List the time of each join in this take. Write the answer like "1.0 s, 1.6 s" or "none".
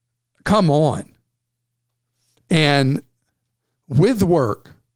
none